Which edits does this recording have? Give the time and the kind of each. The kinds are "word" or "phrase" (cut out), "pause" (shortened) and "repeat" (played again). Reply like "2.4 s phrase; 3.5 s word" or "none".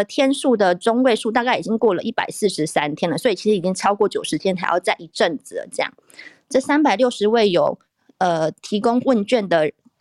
none